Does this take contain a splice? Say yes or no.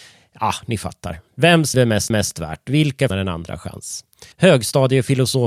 yes